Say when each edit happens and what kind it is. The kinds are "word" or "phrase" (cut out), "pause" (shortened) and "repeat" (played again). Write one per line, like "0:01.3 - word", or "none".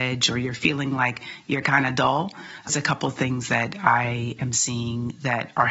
0:02.7 - word